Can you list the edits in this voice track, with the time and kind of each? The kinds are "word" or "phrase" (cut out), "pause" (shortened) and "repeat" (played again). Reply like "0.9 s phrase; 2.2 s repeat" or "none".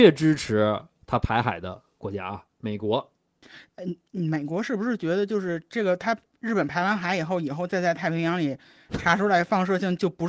2.5 s pause